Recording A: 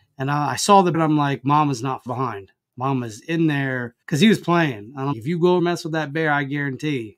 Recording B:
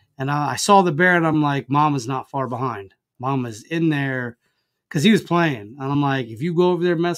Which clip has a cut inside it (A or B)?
A